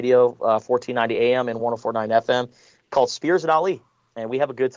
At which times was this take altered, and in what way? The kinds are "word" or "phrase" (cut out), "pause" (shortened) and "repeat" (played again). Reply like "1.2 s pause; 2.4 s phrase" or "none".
none